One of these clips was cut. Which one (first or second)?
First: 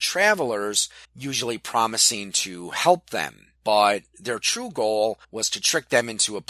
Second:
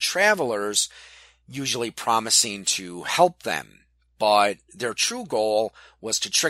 first